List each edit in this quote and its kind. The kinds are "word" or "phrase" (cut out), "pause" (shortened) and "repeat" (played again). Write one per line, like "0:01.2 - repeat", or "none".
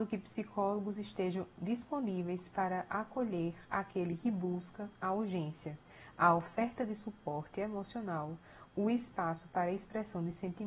none